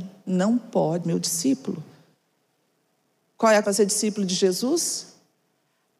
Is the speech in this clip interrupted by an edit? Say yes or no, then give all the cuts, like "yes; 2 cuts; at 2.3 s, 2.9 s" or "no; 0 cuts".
yes; 2 cuts; at 1.0 s, 3.6 s